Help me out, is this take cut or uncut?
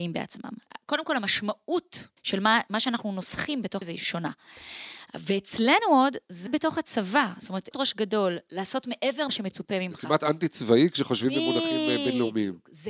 cut